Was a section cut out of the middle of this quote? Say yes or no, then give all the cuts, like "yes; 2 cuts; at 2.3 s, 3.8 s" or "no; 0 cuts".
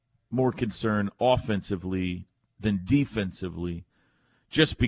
no; 0 cuts